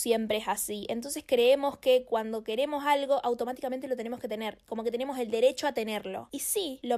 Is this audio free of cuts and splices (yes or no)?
yes